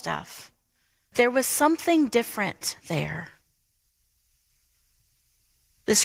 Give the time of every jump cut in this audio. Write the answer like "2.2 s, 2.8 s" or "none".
1.1 s